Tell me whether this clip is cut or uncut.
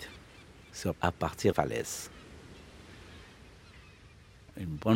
cut